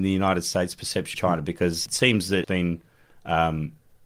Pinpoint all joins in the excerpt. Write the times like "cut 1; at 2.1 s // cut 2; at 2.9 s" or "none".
cut 1; at 1.1 s // cut 2; at 1.9 s // cut 3; at 2.4 s